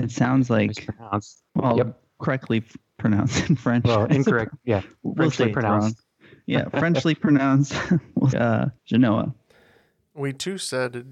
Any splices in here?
yes; 3 cuts; at 1.5 s, 8.3 s, 8.8 s

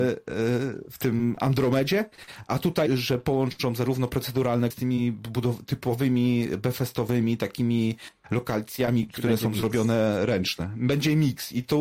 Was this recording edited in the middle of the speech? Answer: yes; 2 cuts; at 2.9 s, 4.7 s

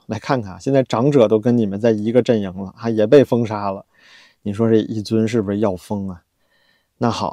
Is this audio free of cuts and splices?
yes; 0 cuts

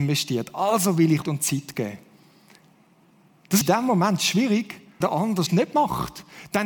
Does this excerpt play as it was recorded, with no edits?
no; 4 cuts; at 1.2 s, 3.6 s, 5.0 s, 5.5 s

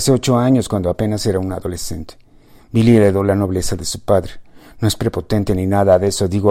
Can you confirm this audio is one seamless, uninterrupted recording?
yes; 0 cuts

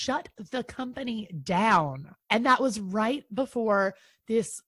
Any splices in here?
yes; 1 cut; at 2.2 s

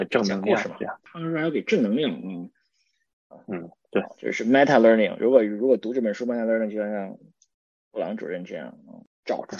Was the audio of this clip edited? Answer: no; 0 cuts

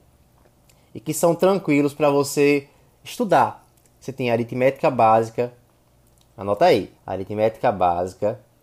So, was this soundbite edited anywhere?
yes; 1 cut; at 7.0 s

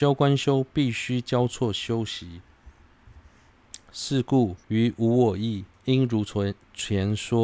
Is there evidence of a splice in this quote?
yes; 2 cuts; at 4.6 s, 5.7 s

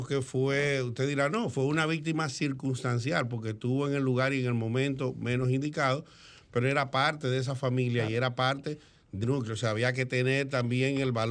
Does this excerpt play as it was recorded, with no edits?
no; 1 cut; at 9.2 s

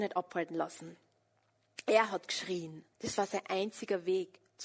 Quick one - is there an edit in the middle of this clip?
yes; 1 cut; at 2.9 s

